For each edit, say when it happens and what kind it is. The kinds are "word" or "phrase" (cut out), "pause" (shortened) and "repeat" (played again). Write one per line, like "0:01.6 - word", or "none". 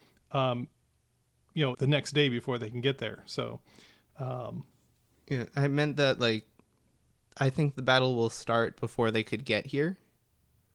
0:01.7 - phrase